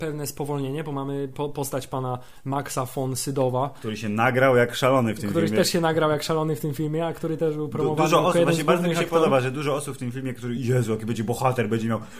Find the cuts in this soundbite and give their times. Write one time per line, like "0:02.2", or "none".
none

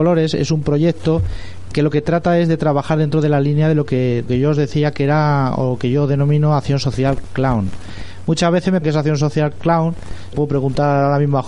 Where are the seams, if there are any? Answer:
0:01.7
0:04.3
0:08.8
0:10.3

